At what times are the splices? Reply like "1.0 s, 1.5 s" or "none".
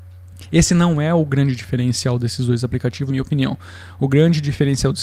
3.1 s